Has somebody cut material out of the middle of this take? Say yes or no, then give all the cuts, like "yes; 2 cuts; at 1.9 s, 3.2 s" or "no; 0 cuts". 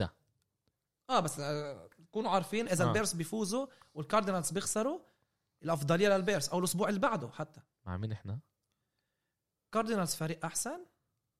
no; 0 cuts